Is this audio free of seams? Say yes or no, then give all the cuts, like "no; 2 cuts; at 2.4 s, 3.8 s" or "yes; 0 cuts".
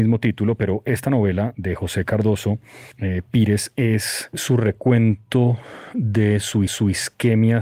no; 3 cuts; at 1.5 s, 2.9 s, 6.7 s